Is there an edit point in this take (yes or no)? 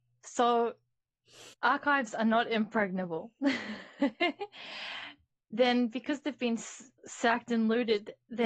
yes